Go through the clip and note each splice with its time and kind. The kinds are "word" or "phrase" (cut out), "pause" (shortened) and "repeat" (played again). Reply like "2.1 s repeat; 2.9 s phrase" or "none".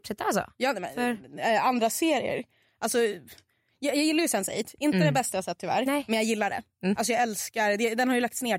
none